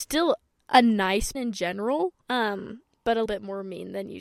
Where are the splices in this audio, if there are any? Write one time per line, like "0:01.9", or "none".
0:01.3
0:02.2
0:03.3

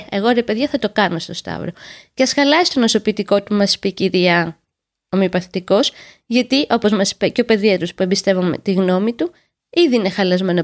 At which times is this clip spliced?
none

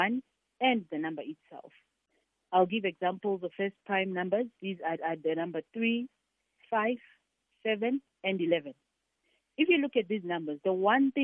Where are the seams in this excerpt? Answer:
0:03.5
0:05.0
0:05.7

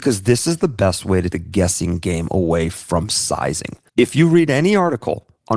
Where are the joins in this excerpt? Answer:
0:01.3
0:03.9

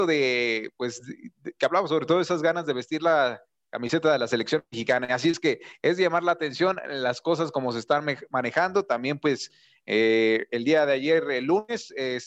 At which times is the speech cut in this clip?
none

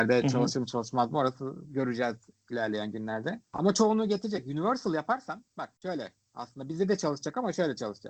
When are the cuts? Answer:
none

